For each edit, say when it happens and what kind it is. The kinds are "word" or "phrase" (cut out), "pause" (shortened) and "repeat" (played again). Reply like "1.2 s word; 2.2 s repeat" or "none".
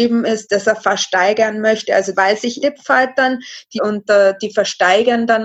2.1 s word; 2.6 s phrase; 3.8 s word